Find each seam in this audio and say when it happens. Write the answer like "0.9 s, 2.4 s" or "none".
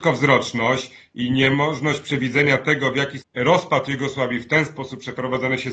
3.2 s